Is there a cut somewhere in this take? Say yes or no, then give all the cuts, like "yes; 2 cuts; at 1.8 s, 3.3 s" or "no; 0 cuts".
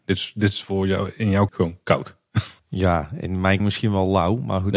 yes; 3 cuts; at 1.5 s, 2.6 s, 3.6 s